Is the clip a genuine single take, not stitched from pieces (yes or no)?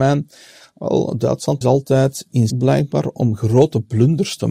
no